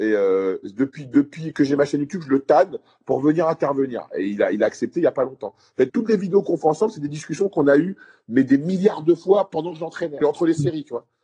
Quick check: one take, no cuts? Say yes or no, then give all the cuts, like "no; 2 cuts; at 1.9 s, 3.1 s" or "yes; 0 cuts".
no; 2 cuts; at 5.9 s, 10.2 s